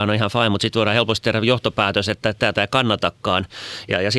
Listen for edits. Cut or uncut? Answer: cut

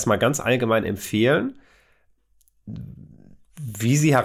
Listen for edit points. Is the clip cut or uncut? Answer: uncut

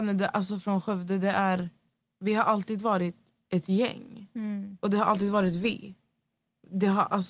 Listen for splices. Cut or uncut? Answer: uncut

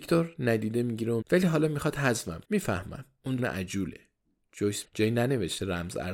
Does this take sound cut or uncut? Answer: cut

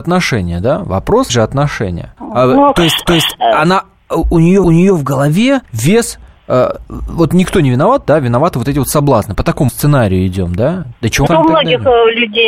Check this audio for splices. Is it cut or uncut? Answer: cut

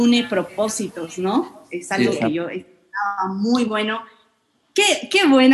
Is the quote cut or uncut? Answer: uncut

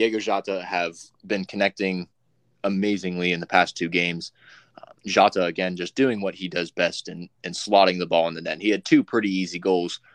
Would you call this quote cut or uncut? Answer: cut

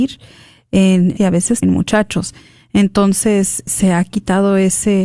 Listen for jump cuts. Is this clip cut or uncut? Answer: cut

